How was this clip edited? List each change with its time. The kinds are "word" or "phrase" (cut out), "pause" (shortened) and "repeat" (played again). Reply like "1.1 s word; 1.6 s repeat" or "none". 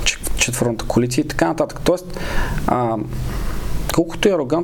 none